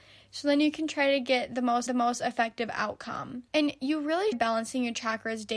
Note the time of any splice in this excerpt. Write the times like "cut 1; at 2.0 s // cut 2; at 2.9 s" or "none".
cut 1; at 1.9 s // cut 2; at 3.5 s // cut 3; at 4.3 s